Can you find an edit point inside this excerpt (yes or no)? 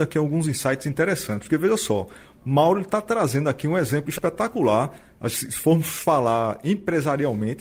no